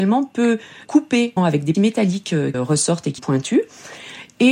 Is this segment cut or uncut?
cut